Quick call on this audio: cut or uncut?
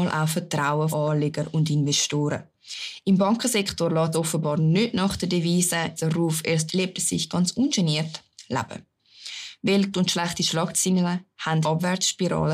cut